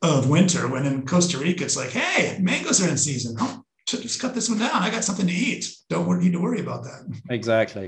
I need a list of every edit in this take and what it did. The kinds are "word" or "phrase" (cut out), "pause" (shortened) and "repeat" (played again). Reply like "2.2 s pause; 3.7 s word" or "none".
none